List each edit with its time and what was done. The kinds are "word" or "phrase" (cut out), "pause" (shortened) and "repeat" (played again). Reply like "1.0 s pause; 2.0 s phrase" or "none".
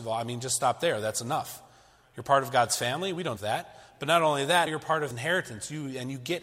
3.4 s word; 4.7 s word; 5.1 s word